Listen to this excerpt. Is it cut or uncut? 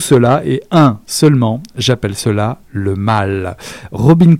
uncut